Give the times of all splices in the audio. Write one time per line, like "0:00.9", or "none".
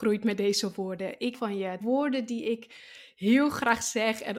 0:01.3
0:01.8